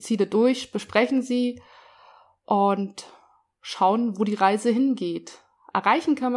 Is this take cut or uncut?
uncut